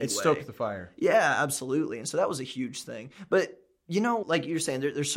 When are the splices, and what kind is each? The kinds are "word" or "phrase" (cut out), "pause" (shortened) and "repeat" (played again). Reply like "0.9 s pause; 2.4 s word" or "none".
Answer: 4.2 s word